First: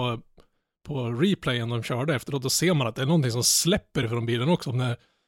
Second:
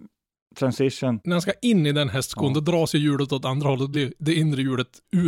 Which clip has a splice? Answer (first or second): second